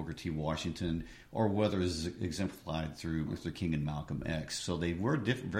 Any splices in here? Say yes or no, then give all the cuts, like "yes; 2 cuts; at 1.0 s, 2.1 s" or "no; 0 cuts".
yes; 1 cut; at 3.3 s